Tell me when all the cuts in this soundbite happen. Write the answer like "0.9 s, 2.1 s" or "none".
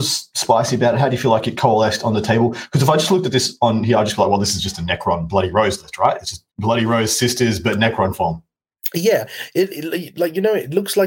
6.5 s